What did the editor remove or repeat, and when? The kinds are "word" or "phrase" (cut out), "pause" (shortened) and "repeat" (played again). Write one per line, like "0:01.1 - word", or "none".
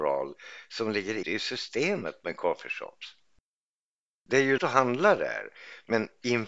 0:01.2 - word
0:04.6 - word